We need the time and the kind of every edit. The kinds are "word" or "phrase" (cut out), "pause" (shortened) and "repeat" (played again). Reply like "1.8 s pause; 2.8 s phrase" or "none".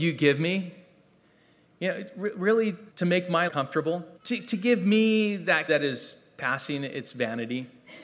2.9 s pause; 3.5 s phrase; 4.2 s pause; 5.7 s phrase